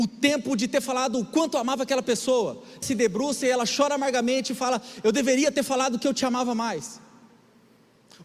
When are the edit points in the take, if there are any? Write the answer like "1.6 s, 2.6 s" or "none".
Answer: 2.8 s